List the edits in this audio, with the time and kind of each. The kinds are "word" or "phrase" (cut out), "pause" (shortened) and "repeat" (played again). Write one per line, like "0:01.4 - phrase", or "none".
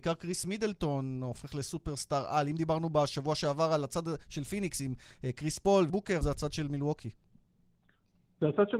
0:05.9 - word
0:06.2 - word